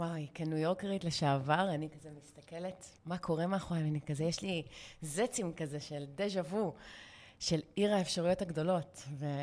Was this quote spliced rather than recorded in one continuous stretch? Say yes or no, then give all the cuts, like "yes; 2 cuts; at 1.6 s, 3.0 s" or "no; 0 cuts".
yes; 1 cut; at 3.0 s